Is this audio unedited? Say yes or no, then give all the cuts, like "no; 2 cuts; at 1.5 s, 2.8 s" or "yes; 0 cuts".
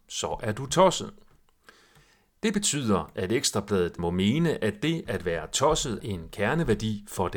no; 2 cuts; at 4.0 s, 6.0 s